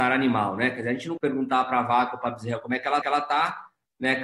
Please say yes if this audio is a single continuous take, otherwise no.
no